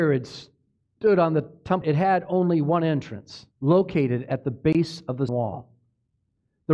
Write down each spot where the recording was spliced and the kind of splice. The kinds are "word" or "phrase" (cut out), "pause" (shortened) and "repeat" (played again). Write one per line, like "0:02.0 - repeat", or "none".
0:01.8 - word
0:03.5 - pause
0:05.3 - word